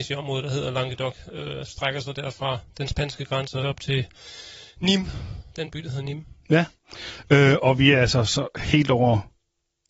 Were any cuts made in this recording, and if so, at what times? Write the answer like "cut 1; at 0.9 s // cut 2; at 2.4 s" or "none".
cut 1; at 1.7 s // cut 2; at 3.6 s // cut 3; at 5.5 s